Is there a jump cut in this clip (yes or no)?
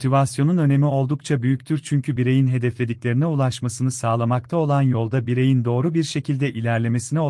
no